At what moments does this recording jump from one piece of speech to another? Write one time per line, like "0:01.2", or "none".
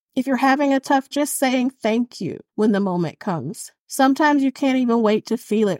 0:01.1
0:02.5
0:03.8